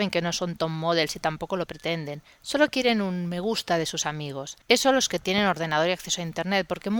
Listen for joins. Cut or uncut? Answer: cut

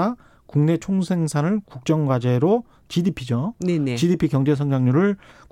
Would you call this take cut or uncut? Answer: uncut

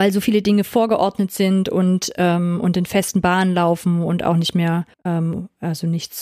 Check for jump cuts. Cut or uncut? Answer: cut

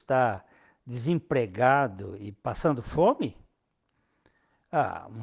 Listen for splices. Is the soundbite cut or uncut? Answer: uncut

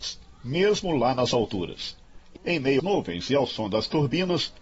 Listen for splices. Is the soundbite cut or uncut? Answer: cut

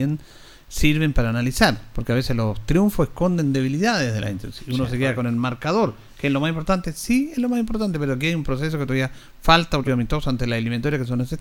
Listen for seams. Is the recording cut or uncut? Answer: cut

